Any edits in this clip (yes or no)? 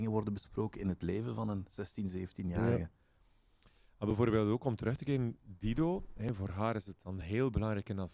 no